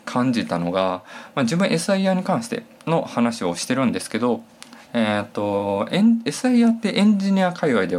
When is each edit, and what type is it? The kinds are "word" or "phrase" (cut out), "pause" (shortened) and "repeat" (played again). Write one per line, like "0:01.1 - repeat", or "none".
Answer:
none

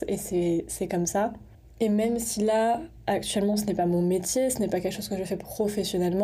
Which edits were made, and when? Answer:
none

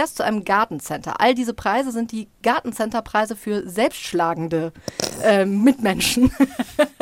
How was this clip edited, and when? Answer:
none

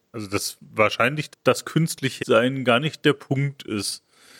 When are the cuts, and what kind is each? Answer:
0:01.3 - word
0:02.2 - word

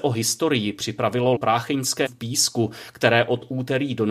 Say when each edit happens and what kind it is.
0:01.4 - word
0:02.1 - word

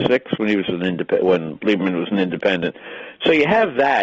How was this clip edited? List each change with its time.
none

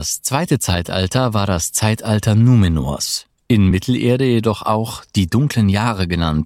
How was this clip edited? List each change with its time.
none

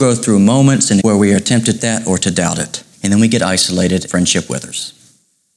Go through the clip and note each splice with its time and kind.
0:01.0 - word
0:01.8 - phrase
0:02.9 - pause
0:04.1 - word

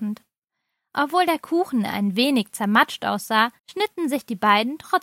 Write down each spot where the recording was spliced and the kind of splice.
0:03.6 - pause

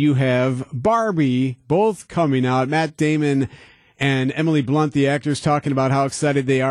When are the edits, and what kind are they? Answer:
none

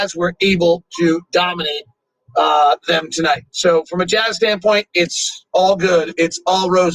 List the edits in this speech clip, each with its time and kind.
none

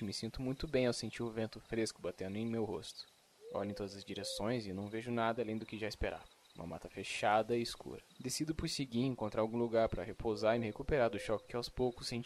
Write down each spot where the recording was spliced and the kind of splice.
0:06.4 - pause
0:08.1 - pause

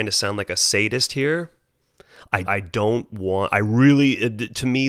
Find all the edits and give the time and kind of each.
0:02.4 - word

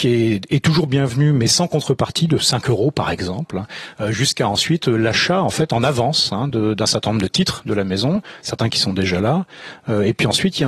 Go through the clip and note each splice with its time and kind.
none

